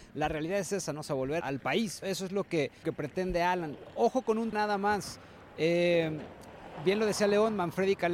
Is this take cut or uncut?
cut